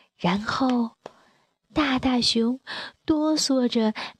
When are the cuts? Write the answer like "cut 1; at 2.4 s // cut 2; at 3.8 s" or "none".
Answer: none